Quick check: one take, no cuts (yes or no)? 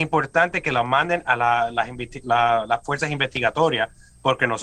yes